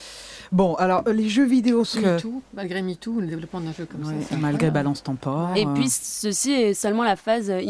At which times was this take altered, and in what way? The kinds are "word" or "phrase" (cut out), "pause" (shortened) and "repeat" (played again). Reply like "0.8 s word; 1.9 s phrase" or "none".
2.0 s word